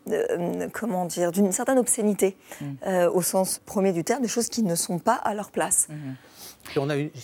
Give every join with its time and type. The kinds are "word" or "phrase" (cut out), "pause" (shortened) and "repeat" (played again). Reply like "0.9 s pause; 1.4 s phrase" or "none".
3.6 s word